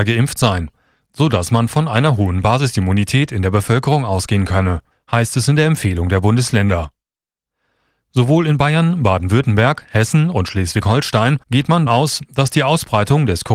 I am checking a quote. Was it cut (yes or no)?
yes